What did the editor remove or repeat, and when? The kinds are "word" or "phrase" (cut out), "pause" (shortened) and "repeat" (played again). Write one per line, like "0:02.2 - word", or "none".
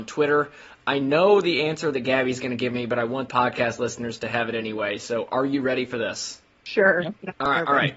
0:03.3 - phrase